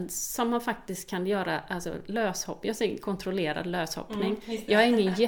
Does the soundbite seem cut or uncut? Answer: uncut